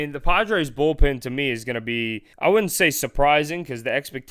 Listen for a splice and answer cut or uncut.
cut